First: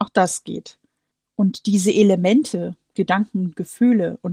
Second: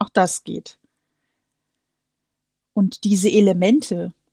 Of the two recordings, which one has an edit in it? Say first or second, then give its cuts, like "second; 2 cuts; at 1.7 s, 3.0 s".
first; 2 cuts; at 1.1 s, 2.9 s